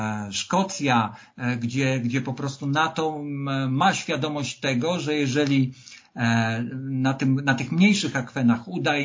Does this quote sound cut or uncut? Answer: uncut